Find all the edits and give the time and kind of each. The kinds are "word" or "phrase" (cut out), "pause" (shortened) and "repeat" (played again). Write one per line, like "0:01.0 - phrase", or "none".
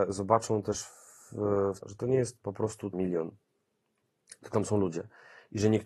0:01.8 - phrase
0:02.9 - word
0:04.5 - word

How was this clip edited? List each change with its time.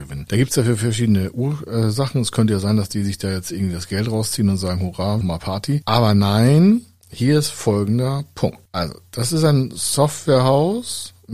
0:05.2 - word

